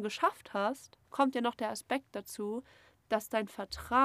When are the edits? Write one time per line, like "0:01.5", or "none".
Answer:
0:01.0